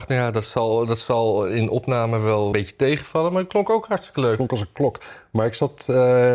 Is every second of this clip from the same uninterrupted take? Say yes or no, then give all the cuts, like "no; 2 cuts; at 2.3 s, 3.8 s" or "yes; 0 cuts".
no; 1 cut; at 2.5 s